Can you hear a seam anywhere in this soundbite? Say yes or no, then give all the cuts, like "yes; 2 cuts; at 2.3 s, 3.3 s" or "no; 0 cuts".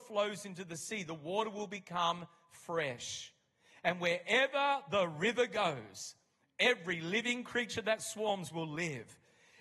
no; 0 cuts